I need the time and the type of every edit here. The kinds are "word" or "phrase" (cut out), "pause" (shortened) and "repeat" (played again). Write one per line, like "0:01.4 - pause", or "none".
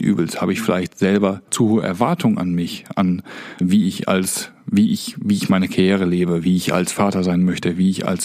0:01.5 - word
0:03.6 - word